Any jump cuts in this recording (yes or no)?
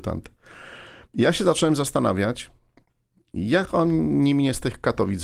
no